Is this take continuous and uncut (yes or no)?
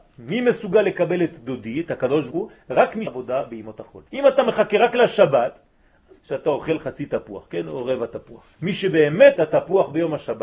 no